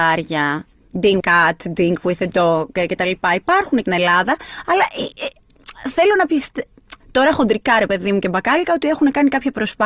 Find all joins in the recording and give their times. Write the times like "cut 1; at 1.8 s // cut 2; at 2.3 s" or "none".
cut 1; at 1.2 s // cut 2; at 3.9 s // cut 3; at 7.0 s